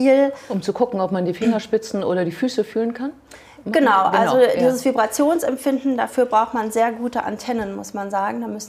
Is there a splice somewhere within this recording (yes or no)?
no